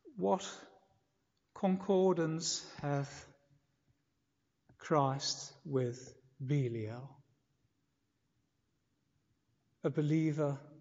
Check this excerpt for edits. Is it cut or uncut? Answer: uncut